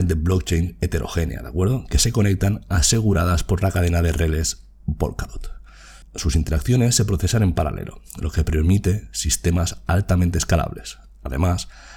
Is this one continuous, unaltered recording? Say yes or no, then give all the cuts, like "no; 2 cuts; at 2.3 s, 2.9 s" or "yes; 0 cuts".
yes; 0 cuts